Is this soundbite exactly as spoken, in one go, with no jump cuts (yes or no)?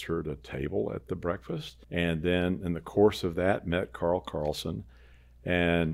no